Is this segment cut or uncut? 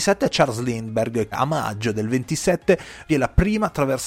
cut